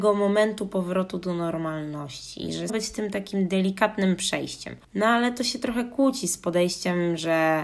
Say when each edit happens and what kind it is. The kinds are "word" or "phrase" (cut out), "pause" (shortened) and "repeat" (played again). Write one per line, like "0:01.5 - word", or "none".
0:02.7 - phrase